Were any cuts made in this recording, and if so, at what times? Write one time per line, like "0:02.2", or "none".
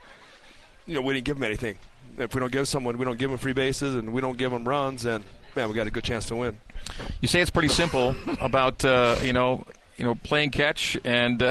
none